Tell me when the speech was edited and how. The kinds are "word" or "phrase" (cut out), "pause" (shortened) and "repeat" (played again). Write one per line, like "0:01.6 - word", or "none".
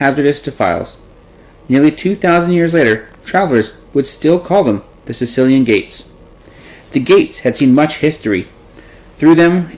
none

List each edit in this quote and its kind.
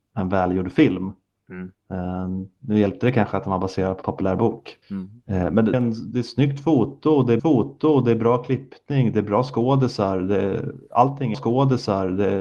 0:01.8 - pause
0:04.0 - word
0:04.8 - pause
0:05.7 - word
0:07.4 - repeat
0:11.3 - repeat

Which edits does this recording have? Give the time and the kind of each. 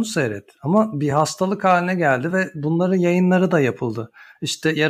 none

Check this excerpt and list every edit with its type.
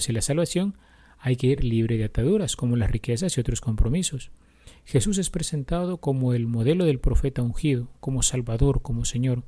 none

